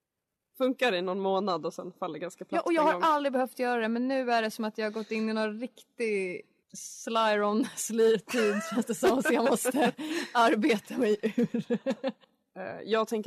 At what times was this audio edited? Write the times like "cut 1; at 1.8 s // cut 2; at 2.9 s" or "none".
cut 1; at 6.6 s